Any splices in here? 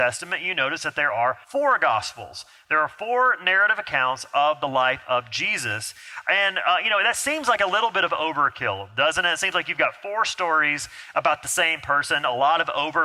yes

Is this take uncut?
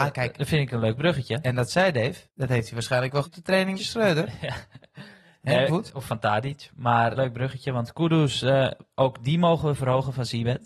no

